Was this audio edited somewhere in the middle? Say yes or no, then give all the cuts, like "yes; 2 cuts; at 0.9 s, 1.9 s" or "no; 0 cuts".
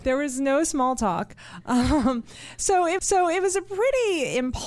yes; 1 cut; at 3.0 s